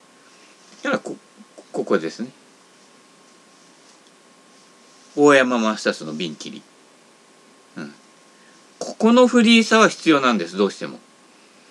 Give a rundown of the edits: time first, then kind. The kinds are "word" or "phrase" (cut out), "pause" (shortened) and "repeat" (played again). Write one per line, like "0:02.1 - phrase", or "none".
none

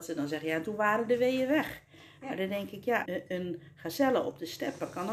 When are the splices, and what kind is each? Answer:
0:03.0 - word

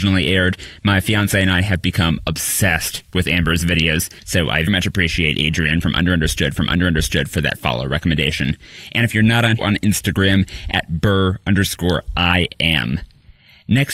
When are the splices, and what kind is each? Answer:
0:04.2 - pause
0:04.7 - word
0:06.6 - repeat
0:09.6 - phrase

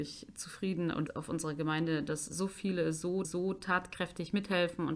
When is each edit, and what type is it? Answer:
0:01.1 - word
0:03.2 - repeat

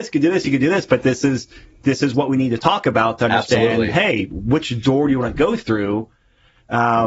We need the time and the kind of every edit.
none

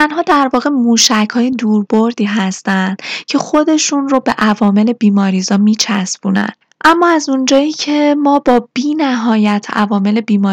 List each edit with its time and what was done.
none

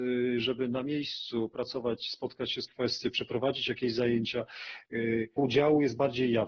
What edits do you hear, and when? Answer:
0:02.7 - phrase
0:05.4 - word

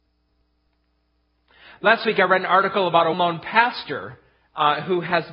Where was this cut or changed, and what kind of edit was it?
0:03.1 - word

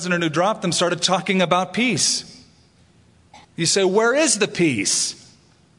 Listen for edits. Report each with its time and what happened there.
0:03.4 - pause

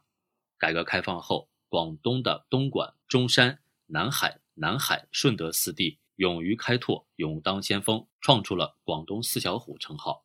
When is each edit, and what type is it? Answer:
0:03.0 - pause
0:04.4 - repeat
0:06.1 - pause

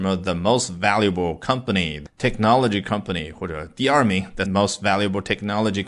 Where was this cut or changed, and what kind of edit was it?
0:02.1 - phrase
0:04.5 - word

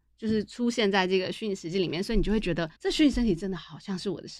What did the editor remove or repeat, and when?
0:02.8 - pause

